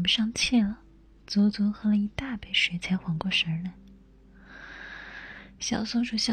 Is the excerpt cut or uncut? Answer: uncut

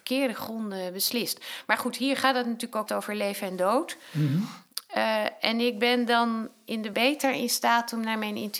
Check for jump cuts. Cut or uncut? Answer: cut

